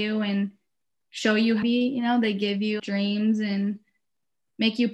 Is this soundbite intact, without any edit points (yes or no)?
no